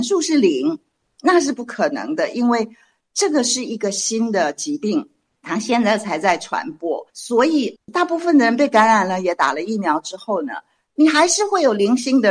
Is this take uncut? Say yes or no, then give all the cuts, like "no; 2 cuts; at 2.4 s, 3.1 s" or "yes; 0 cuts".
no; 1 cut; at 7.1 s